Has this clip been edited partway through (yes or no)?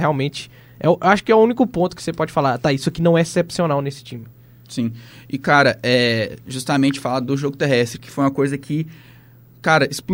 no